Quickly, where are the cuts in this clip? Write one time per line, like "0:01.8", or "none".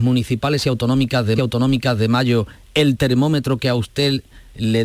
0:01.4